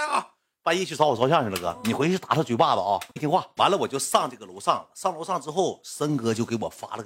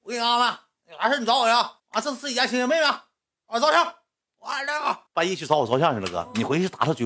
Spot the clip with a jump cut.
second; 2 cuts; at 1.8 s, 5.1 s

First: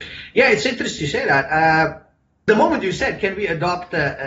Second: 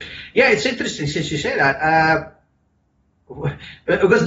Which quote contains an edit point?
first; 2 cuts; at 1.0 s, 2.5 s

